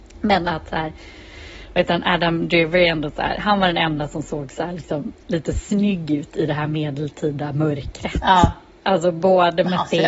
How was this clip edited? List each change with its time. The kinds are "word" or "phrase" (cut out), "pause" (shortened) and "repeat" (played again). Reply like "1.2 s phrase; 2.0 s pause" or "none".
none